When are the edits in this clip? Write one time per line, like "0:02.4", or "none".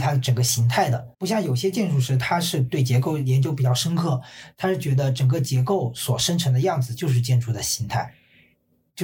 0:01.1